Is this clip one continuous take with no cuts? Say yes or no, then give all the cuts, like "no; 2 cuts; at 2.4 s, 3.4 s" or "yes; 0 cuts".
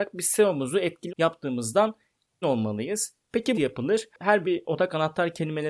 no; 4 cuts; at 1.1 s, 2.4 s, 3.5 s, 4.4 s